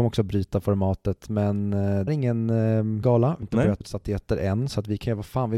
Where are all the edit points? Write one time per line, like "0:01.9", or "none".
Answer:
0:02.1
0:03.0
0:03.4
0:03.8